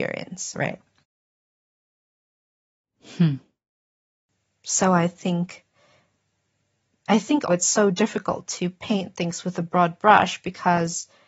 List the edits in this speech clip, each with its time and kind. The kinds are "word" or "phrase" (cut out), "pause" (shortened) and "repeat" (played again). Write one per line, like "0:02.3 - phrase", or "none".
0:07.5 - word